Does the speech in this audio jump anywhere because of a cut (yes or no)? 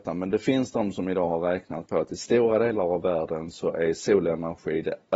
no